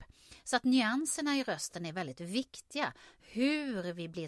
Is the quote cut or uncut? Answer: uncut